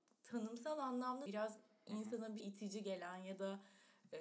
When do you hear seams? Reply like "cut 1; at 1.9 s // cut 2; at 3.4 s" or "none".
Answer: cut 1; at 1.3 s // cut 2; at 2.4 s